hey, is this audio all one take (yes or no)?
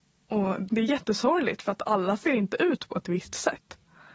yes